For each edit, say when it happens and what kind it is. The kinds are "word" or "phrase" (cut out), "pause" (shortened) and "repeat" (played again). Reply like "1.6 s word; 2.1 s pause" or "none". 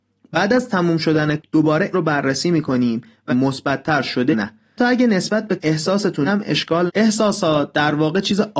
1.4 s word; 1.9 s word; 3.3 s word; 4.3 s word; 4.8 s word; 5.6 s word; 6.3 s word; 6.9 s word

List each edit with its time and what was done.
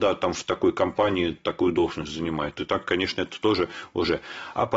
none

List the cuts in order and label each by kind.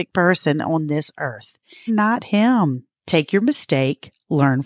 1.9 s phrase; 3.0 s pause

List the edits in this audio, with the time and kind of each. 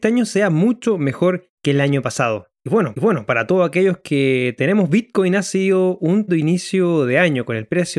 1.6 s pause; 2.6 s pause; 2.9 s repeat; 6.3 s word

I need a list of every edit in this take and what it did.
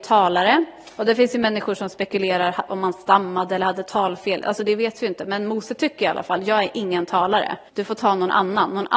7.7 s pause

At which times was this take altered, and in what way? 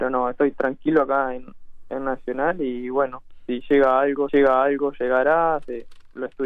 4.3 s repeat

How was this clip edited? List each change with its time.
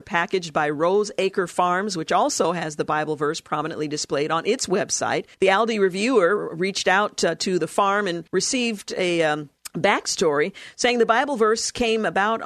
5.3 s pause; 8.3 s pause

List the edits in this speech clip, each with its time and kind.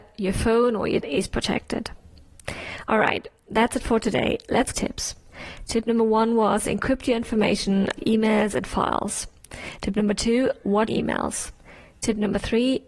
1.0 s word; 4.7 s phrase; 8.0 s word; 10.9 s phrase

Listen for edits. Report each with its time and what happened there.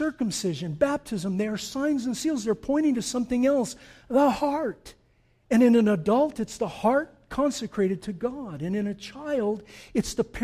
none

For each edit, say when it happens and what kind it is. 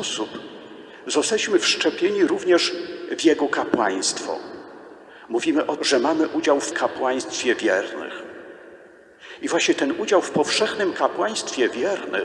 5.8 s word; 6.7 s word

